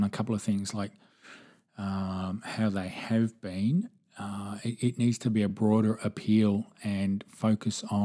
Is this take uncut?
yes; 0 cuts

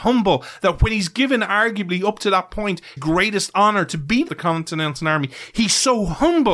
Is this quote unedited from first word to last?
no; 2 cuts; at 3.0 s, 4.3 s

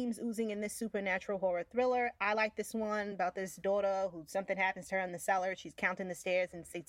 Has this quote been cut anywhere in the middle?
no; 0 cuts

